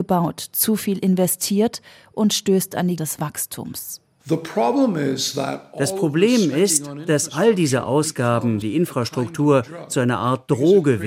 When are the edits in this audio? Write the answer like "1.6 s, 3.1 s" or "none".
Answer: 3.0 s, 8.6 s